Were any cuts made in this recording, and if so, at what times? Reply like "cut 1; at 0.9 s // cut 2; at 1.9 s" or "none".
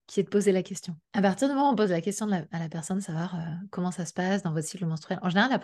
cut 1; at 1.0 s